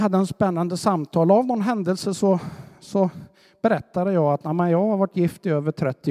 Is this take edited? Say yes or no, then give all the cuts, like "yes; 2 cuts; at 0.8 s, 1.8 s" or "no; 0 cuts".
no; 0 cuts